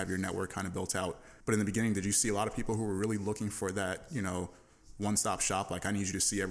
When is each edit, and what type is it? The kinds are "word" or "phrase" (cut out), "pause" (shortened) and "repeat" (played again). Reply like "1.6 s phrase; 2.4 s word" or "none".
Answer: 1.4 s pause